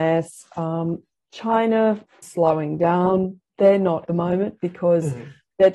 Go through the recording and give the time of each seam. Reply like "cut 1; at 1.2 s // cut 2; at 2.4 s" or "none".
cut 1; at 2.2 s // cut 2; at 4.1 s